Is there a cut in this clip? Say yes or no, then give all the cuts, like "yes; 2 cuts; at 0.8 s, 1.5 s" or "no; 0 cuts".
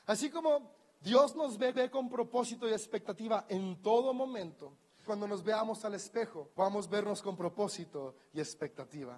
yes; 3 cuts; at 1.7 s, 5.1 s, 6.5 s